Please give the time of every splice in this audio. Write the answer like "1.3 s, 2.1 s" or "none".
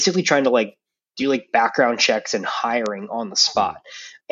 none